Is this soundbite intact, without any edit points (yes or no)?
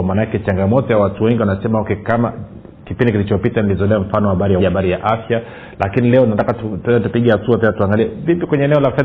no